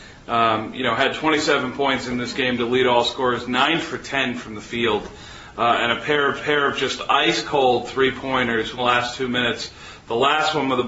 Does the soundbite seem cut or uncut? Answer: cut